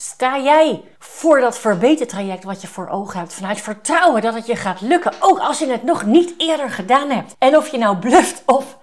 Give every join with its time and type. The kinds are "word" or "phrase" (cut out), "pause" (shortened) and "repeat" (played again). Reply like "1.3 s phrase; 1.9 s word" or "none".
0.9 s pause